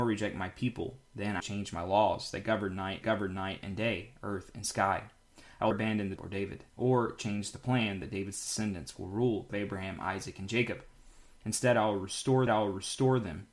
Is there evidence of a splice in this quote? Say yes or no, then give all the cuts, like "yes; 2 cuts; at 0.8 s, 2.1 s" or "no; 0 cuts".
yes; 7 cuts; at 1.4 s, 3.0 s, 5.7 s, 6.2 s, 6.7 s, 9.5 s, 12.5 s